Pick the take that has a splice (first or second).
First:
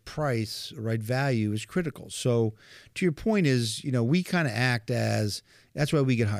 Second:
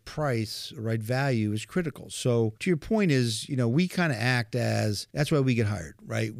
second